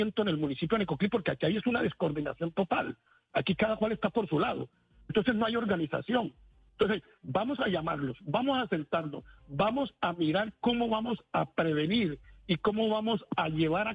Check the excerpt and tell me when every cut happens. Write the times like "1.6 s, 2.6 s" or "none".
none